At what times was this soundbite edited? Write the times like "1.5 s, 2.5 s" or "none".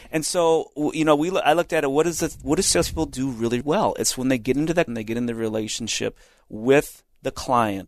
3.6 s, 4.9 s